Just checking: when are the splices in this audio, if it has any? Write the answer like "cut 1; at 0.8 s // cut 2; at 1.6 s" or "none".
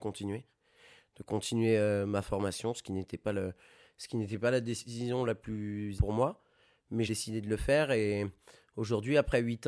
cut 1; at 6.0 s // cut 2; at 7.1 s